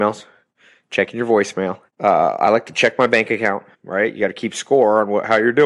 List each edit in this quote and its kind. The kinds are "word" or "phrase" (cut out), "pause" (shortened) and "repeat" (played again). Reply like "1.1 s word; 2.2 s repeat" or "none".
1.9 s pause; 3.7 s pause